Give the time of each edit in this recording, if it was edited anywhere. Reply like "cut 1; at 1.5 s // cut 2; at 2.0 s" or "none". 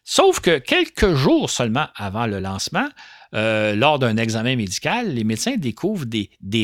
none